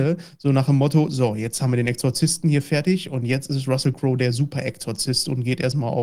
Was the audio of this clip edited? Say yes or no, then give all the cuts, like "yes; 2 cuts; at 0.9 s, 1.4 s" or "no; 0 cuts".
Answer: no; 0 cuts